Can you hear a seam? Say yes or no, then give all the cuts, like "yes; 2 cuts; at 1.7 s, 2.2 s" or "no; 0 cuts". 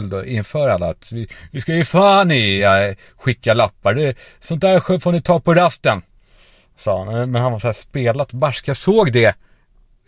no; 0 cuts